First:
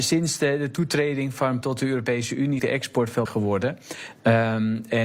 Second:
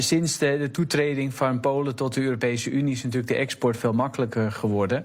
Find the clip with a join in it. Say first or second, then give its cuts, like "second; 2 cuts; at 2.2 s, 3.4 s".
first; 3 cuts; at 1.6 s, 2.6 s, 3.3 s